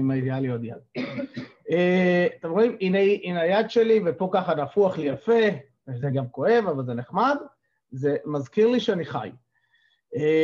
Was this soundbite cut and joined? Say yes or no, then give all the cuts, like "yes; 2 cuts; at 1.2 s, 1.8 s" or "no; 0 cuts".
no; 0 cuts